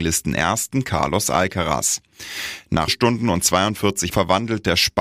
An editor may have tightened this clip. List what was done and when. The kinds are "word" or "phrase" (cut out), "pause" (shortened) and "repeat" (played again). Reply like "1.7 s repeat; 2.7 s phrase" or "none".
2.9 s word; 4.1 s word